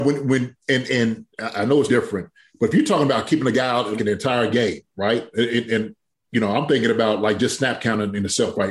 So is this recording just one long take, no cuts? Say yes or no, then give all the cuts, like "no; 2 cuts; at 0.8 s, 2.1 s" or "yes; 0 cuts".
no; 2 cuts; at 1.9 s, 4.0 s